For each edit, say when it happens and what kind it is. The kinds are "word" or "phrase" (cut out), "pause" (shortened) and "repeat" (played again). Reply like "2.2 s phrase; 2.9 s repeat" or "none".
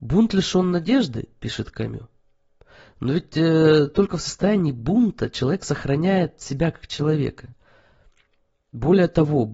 none